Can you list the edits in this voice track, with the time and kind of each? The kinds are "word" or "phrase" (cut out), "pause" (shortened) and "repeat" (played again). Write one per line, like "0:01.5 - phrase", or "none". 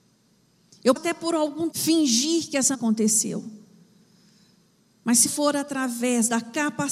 0:01.0 - word
0:01.7 - word
0:02.7 - word
0:05.3 - word